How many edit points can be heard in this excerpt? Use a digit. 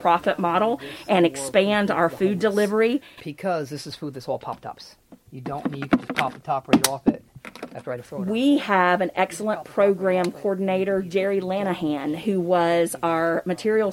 1